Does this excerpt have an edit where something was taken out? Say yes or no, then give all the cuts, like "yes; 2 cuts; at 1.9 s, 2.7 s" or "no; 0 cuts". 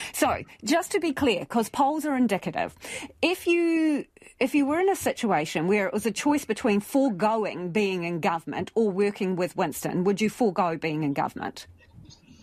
no; 0 cuts